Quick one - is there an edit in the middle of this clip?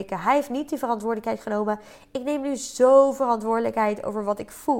no; 0 cuts

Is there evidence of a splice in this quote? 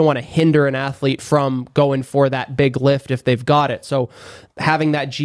no; 0 cuts

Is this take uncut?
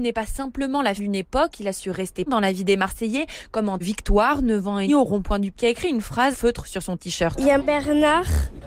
no; 7 cuts; at 1.0 s, 2.3 s, 3.8 s, 4.9 s, 5.5 s, 6.3 s, 7.6 s

